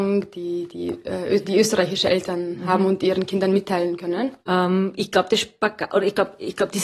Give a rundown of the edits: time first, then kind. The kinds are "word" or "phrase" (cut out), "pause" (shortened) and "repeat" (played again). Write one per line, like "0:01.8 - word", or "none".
0:04.4 - pause